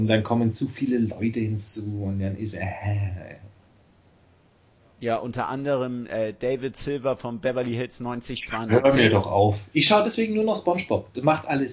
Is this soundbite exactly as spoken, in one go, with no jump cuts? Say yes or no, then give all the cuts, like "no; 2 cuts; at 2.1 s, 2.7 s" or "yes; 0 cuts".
yes; 0 cuts